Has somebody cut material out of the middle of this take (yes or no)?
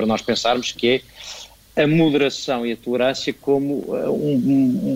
no